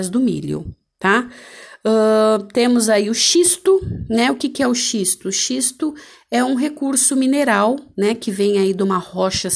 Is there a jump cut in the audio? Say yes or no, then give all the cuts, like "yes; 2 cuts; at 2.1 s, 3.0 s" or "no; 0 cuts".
no; 0 cuts